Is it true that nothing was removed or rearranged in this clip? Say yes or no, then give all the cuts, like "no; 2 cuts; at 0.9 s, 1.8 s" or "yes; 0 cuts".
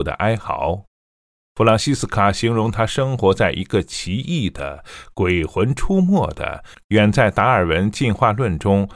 yes; 0 cuts